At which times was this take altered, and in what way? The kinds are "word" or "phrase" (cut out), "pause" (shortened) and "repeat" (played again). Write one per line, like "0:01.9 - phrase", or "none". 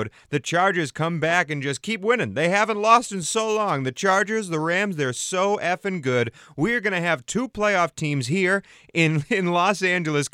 none